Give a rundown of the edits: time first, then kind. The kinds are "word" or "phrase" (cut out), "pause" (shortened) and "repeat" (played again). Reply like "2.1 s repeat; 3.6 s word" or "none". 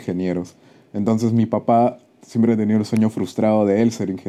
none